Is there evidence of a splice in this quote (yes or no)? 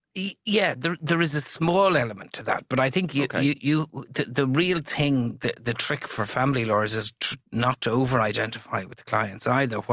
no